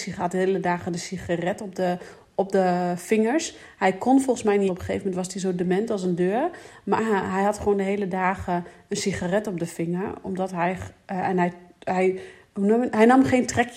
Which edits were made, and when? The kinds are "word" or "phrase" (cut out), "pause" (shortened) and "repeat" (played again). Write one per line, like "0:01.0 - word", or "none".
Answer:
0:04.7 - phrase